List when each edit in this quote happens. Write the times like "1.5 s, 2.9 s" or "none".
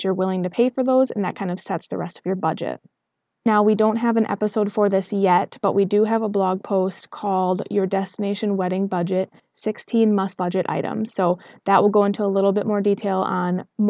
10.4 s